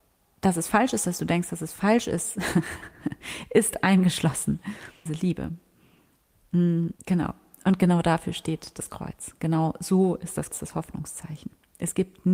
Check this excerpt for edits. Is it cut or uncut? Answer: cut